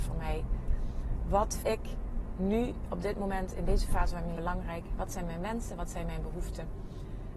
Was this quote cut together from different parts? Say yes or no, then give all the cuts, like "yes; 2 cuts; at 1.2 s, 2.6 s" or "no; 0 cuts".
yes; 2 cuts; at 1.6 s, 4.4 s